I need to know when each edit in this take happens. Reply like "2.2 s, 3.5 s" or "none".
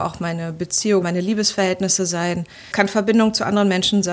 1.0 s, 2.7 s